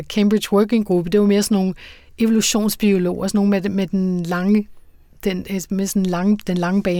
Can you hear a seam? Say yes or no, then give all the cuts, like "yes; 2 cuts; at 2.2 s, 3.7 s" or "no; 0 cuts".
no; 0 cuts